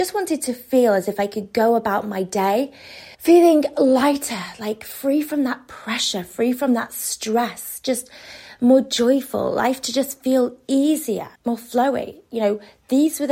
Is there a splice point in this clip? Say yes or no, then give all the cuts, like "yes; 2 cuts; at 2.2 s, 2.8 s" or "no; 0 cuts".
yes; 2 cuts; at 3.1 s, 11.4 s